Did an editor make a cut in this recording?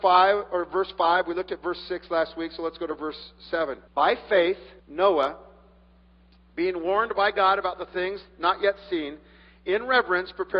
yes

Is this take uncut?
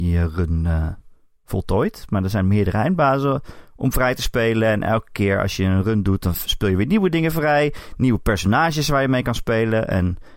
yes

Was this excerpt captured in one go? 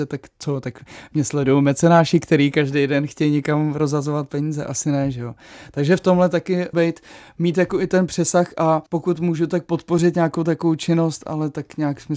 no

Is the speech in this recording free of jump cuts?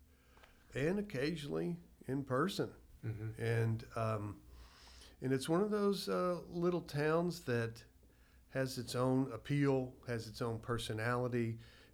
yes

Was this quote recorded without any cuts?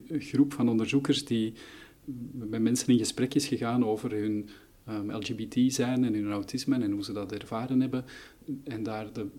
yes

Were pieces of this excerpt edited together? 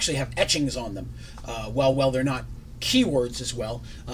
no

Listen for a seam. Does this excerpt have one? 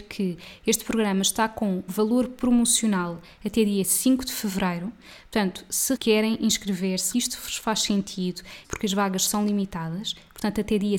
yes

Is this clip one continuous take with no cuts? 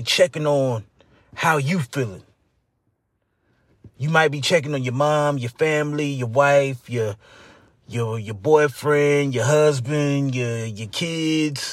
yes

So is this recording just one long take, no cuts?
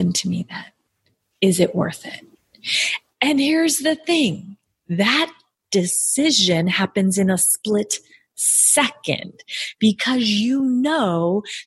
yes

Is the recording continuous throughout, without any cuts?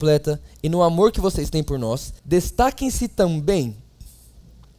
no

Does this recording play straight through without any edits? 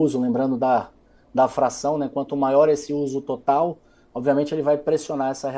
yes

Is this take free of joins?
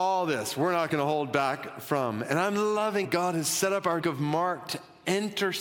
no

